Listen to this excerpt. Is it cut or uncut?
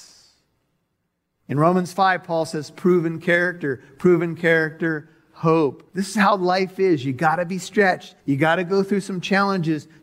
cut